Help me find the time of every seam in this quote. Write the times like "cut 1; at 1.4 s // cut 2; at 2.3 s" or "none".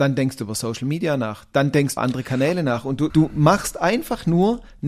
cut 1; at 2.0 s // cut 2; at 3.1 s